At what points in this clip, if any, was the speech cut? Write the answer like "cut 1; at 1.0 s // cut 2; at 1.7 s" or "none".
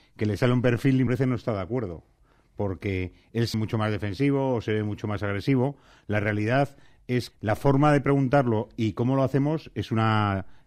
cut 1; at 1.1 s // cut 2; at 3.5 s // cut 3; at 7.3 s